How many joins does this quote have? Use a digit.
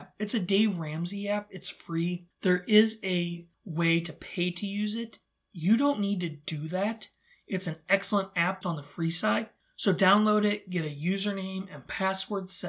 2